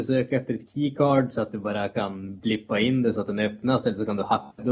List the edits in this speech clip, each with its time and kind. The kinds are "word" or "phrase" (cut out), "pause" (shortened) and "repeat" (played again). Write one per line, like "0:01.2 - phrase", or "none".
none